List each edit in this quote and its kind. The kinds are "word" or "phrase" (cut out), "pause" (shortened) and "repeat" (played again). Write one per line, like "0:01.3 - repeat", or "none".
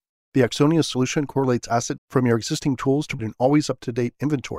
0:02.0 - word
0:03.2 - word